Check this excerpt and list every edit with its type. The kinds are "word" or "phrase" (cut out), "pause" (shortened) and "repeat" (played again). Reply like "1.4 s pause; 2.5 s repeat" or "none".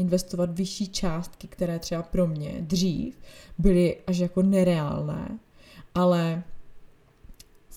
none